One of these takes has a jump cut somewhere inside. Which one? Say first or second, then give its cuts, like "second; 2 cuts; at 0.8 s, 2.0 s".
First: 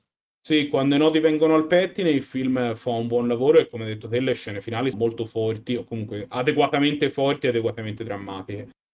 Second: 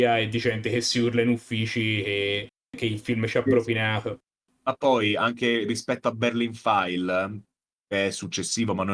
first; 1 cut; at 4.9 s